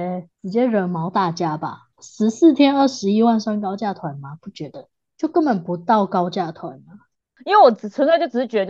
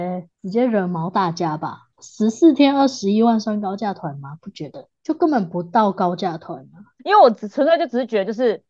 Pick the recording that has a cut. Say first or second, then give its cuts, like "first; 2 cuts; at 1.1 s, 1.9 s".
second; 2 cuts; at 4.9 s, 7.0 s